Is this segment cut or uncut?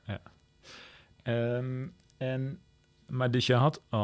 uncut